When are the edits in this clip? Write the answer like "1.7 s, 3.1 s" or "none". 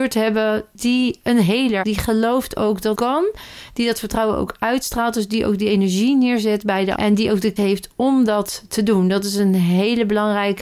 1.8 s, 2.9 s, 7.0 s, 7.6 s